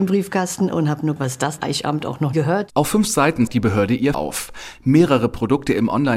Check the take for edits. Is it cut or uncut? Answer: cut